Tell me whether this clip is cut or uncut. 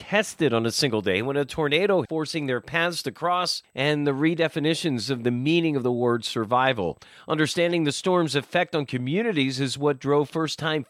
cut